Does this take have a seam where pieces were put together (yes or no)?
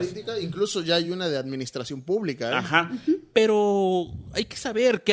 no